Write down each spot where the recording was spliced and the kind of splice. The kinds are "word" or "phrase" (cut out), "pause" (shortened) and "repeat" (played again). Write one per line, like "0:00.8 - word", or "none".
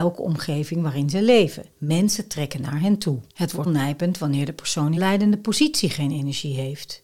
0:01.7 - pause
0:03.3 - pause
0:03.7 - word
0:05.0 - word

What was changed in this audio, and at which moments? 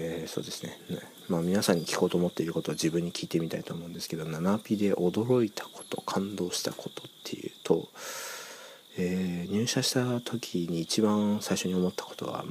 none

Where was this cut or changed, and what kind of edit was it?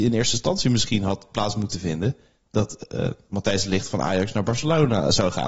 none

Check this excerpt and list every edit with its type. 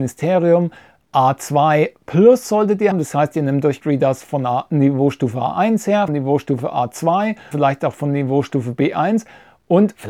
0:02.9 - word
0:03.8 - word
0:06.1 - word
0:07.5 - word

